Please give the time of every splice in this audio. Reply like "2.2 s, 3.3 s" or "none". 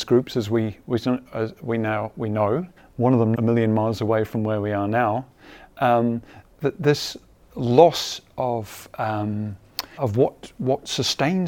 2.8 s, 3.3 s, 10.0 s